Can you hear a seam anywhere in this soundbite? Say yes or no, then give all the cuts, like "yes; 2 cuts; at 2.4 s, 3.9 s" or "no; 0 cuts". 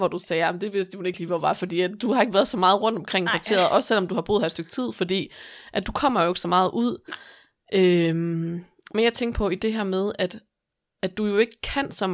no; 0 cuts